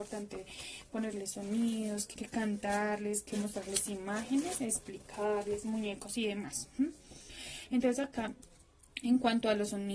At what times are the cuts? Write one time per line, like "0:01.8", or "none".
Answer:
0:02.1